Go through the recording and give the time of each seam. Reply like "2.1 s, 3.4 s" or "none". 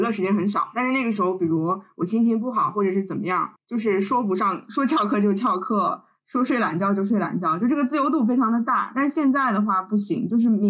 3.6 s